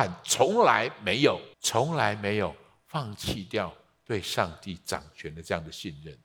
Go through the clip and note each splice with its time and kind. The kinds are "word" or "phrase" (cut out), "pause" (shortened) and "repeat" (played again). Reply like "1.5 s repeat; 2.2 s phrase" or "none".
1.5 s pause